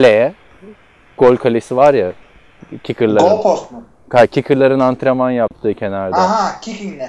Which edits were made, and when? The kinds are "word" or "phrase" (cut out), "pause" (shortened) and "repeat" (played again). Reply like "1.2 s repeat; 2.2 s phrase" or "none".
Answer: none